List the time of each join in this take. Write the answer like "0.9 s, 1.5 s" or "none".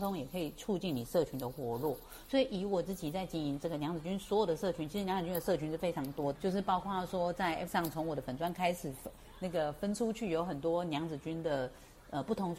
6.4 s, 7.7 s